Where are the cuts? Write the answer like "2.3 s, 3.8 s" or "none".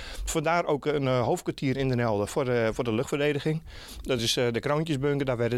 none